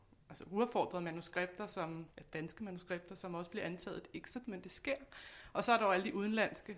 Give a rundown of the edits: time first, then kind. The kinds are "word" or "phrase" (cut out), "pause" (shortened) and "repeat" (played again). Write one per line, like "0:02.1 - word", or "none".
0:02.1 - word
0:04.4 - word